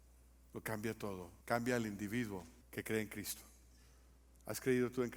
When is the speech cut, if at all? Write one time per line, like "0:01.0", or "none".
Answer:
0:01.4
0:02.6